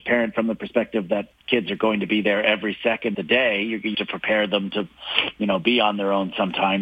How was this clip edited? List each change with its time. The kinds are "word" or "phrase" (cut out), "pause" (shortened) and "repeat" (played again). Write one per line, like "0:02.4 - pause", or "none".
0:01.3 - word
0:03.1 - word
0:03.9 - word